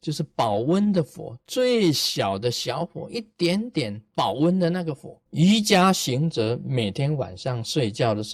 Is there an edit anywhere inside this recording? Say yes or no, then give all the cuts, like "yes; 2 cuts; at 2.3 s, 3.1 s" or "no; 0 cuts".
yes; 1 cut; at 5.3 s